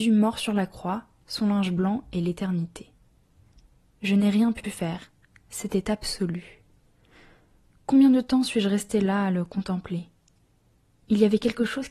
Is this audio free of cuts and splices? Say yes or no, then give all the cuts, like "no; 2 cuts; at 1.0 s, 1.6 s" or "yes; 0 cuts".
no; 1 cut; at 4.6 s